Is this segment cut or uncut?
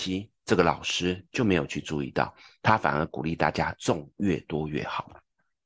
uncut